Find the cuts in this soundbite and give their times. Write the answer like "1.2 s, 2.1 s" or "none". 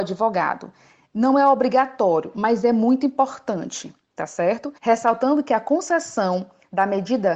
4.8 s